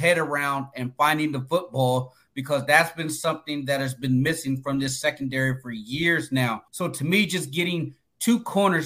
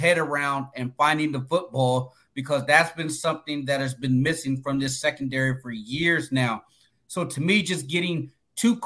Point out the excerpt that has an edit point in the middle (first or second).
first